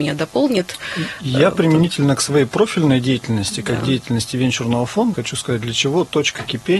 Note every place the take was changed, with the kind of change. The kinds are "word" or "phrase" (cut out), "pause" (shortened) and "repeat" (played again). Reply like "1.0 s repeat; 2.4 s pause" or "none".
5.1 s word